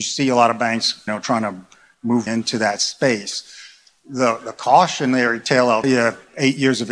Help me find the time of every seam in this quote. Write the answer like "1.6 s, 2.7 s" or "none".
1.1 s, 2.3 s, 5.8 s